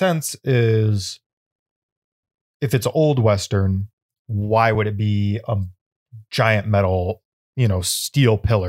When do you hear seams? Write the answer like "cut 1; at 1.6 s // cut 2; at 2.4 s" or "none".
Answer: none